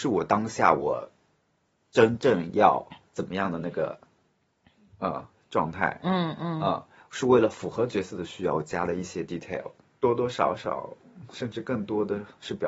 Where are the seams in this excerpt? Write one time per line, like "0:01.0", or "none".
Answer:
none

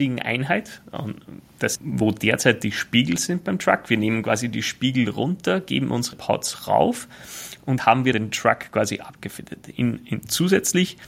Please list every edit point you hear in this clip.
0:01.7
0:06.1
0:07.8
0:08.1

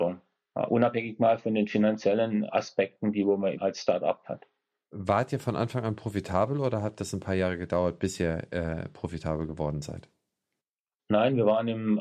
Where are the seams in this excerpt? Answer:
0:03.5

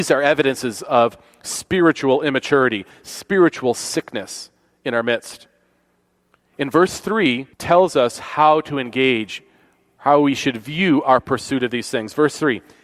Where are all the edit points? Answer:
0:07.5

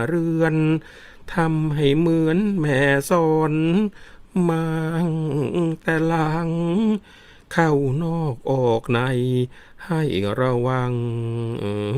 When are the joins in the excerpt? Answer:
none

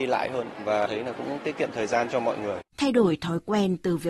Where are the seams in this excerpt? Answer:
0:02.7

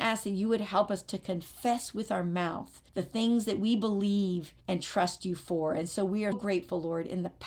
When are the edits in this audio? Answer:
0:02.9
0:04.6
0:06.3

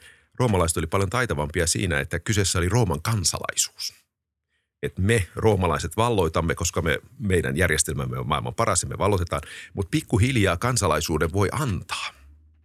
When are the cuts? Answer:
none

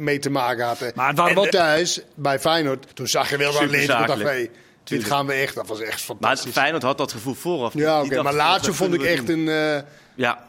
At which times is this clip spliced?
0:01.5
0:02.9

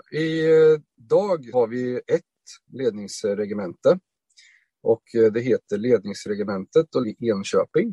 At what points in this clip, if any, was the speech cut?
0:01.5
0:07.0

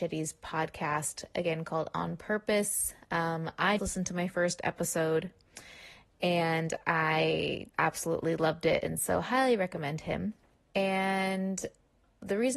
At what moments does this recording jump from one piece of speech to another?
0:03.8
0:07.7

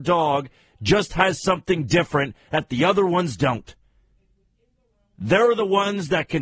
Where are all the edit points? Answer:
none

